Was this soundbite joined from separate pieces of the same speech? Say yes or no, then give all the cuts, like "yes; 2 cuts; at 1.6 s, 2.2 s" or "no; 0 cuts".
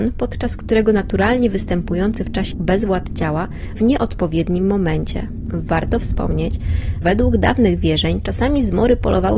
yes; 3 cuts; at 2.5 s, 3.8 s, 7.0 s